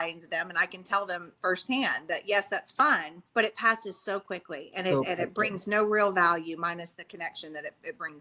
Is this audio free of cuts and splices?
no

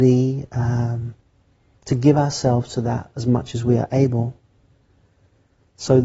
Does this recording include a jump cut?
no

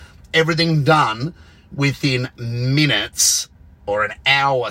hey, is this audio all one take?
yes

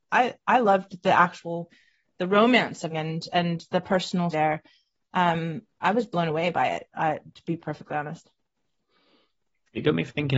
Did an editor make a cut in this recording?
yes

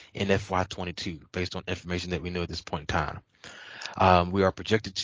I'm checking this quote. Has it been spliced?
no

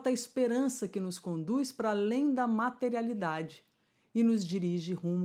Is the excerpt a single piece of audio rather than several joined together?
yes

